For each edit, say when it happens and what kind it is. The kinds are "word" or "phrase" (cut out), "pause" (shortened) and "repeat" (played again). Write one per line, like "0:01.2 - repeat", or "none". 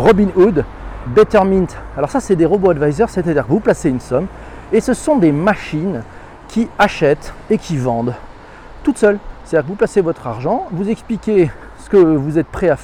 0:01.1 - word